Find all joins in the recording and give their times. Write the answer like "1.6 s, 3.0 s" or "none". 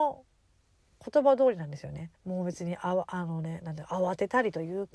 2.2 s